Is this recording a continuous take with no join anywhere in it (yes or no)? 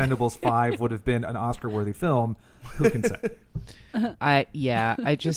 yes